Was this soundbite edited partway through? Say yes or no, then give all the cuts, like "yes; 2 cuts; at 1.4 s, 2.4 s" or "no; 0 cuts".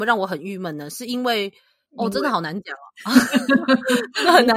no; 0 cuts